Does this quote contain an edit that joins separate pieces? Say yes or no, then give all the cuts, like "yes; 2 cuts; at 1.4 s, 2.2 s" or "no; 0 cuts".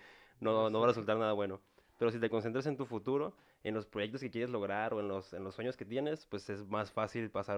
no; 0 cuts